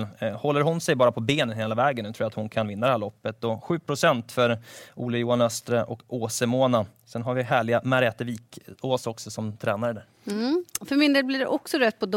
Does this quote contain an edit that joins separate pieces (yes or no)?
no